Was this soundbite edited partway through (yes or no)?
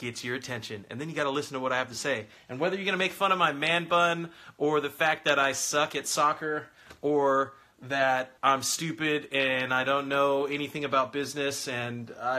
yes